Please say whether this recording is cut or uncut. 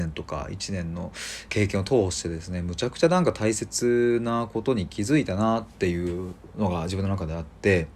cut